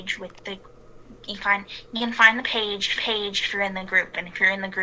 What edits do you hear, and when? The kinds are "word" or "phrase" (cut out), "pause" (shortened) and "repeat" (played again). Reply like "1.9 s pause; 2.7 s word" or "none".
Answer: 1.4 s word; 3.0 s repeat